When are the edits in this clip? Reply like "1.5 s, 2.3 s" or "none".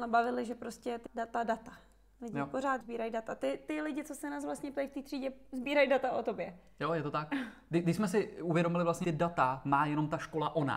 1.1 s, 2.8 s, 9.0 s